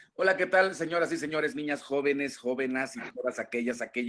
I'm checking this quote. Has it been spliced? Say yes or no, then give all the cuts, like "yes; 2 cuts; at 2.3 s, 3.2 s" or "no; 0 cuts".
yes; 2 cuts; at 1.5 s, 3.1 s